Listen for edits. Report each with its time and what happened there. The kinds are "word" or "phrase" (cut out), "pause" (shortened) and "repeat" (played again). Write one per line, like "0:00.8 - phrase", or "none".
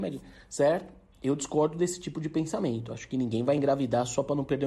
none

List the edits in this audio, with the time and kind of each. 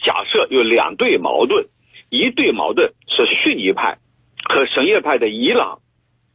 0:04.2 - pause

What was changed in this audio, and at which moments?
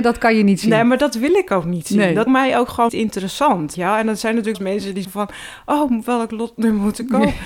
0:02.3 - phrase
0:02.9 - word
0:03.7 - word
0:04.5 - word
0:05.0 - word

